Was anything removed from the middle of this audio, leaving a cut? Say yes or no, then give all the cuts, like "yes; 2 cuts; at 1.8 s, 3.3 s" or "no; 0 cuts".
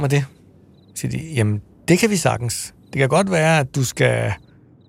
no; 0 cuts